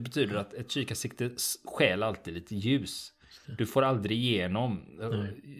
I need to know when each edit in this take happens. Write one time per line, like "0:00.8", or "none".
none